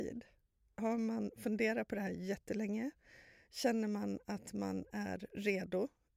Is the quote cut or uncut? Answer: uncut